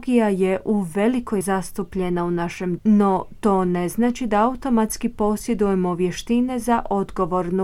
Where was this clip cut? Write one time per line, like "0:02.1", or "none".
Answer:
0:01.4
0:02.8